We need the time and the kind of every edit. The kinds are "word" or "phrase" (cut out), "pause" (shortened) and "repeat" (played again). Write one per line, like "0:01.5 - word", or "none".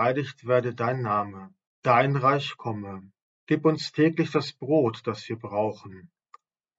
0:01.7 - pause
0:03.2 - pause